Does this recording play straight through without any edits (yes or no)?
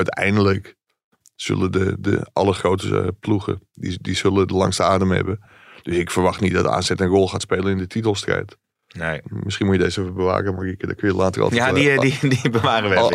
yes